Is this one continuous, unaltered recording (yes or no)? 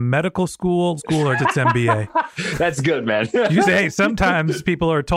no